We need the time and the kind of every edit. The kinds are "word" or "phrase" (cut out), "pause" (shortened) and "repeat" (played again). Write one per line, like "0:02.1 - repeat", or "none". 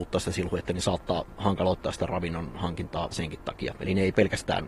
none